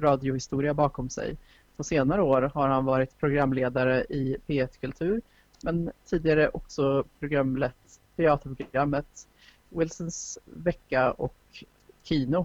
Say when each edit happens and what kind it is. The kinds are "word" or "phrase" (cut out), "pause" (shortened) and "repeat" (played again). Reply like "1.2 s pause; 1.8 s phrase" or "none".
none

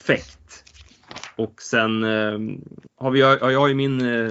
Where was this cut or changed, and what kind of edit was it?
2.9 s word

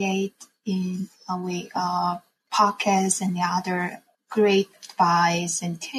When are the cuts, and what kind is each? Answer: none

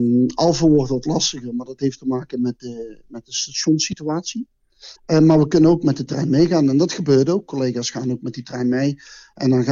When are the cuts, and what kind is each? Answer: 5.0 s pause

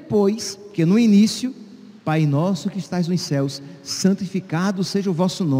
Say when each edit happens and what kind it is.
2.0 s pause

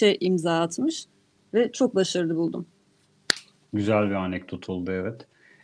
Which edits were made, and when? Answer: none

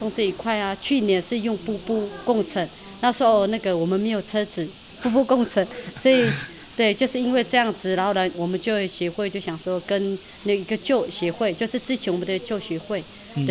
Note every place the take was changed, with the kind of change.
8.3 s word

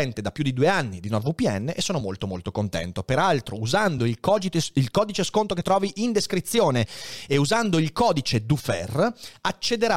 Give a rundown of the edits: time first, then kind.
none

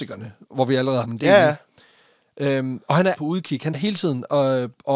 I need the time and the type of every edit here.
1.0 s word; 3.1 s word; 3.7 s word

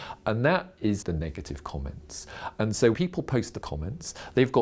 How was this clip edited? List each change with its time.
1.0 s word; 2.9 s word; 3.6 s word

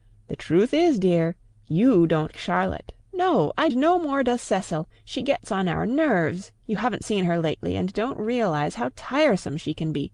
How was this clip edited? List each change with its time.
2.3 s word; 3.0 s pause; 3.7 s phrase

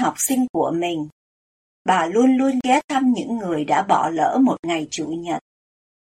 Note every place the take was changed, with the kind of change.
none

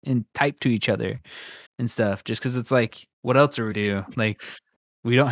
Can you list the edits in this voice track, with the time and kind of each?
1.7 s pause; 3.7 s word

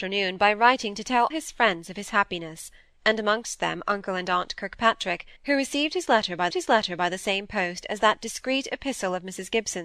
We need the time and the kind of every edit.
1.3 s word; 5.4 s pause; 6.5 s repeat

